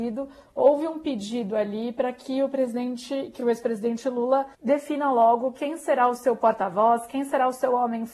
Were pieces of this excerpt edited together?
yes; 1 cut; at 4.5 s

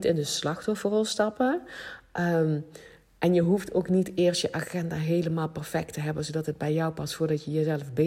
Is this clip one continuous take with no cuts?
yes; 0 cuts

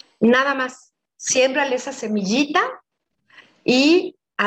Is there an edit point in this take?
no; 0 cuts

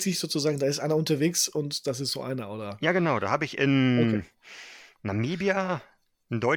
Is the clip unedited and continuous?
yes; 0 cuts

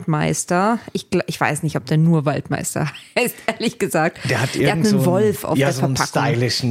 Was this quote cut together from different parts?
no; 0 cuts

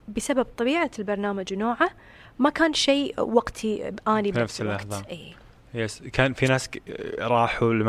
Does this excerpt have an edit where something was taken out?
no; 0 cuts

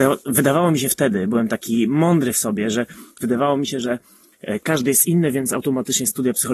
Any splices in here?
no; 0 cuts

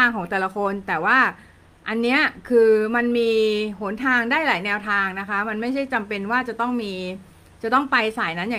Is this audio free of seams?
yes; 0 cuts

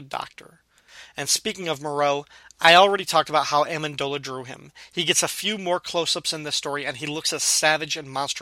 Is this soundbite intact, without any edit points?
yes; 0 cuts

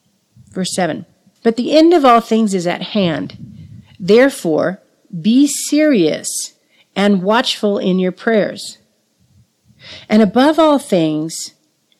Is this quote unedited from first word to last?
yes; 0 cuts

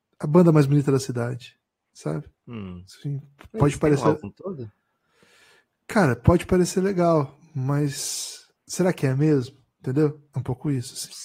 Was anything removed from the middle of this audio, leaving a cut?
yes; 2 cuts; at 2.4 s, 8.6 s

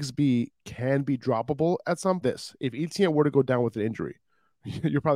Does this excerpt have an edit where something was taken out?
yes; 1 cut; at 2.2 s

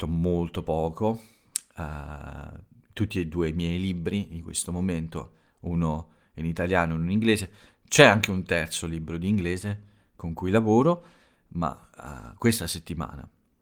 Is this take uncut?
yes; 0 cuts

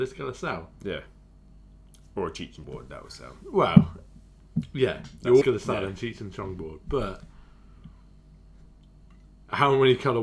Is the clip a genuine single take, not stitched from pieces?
no; 2 cuts; at 2.6 s, 5.4 s

